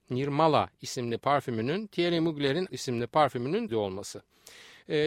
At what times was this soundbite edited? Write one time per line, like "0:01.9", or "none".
0:02.7
0:03.7